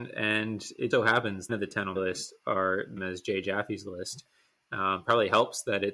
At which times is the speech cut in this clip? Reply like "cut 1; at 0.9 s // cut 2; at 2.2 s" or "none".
cut 1; at 0.9 s // cut 2; at 1.5 s // cut 3; at 2.0 s // cut 4; at 3.0 s